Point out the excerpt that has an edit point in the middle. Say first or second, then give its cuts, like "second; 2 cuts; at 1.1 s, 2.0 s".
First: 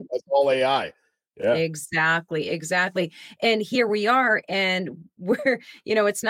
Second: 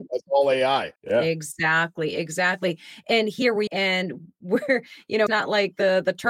second; 3 cuts; at 1.0 s, 3.7 s, 5.3 s